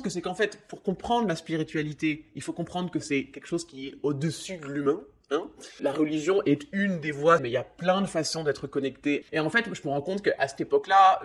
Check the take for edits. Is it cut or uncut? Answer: cut